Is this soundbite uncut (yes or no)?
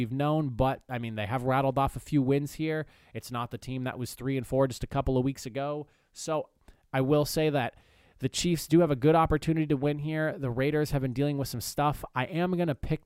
yes